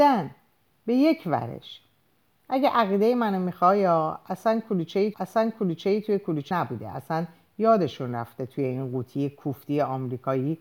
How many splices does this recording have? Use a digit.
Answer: 2